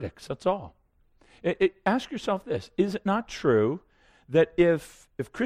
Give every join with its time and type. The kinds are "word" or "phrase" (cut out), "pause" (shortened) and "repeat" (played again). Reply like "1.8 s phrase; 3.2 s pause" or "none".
none